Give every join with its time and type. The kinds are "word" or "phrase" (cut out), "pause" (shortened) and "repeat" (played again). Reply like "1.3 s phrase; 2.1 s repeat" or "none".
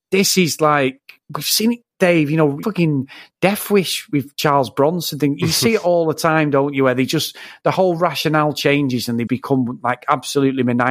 2.6 s word; 9.3 s word

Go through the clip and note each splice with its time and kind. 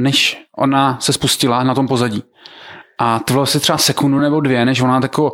none

